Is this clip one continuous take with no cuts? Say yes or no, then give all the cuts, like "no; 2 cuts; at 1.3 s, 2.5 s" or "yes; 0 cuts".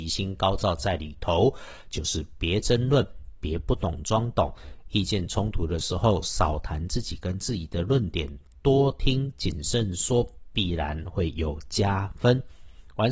yes; 0 cuts